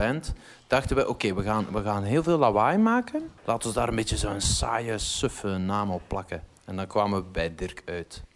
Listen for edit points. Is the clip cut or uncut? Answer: cut